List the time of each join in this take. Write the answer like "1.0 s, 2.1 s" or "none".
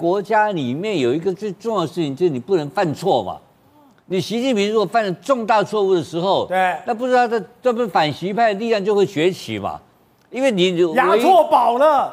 none